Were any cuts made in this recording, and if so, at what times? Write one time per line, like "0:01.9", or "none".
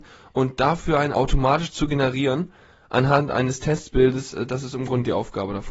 0:01.1